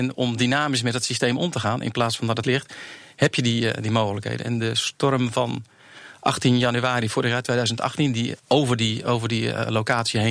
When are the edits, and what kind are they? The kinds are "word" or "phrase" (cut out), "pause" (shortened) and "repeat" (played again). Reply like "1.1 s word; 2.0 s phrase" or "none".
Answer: 2.4 s word; 8.4 s pause